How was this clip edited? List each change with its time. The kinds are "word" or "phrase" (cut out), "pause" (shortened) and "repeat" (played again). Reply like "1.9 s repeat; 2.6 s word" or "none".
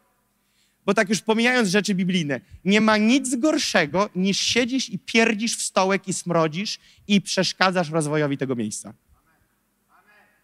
none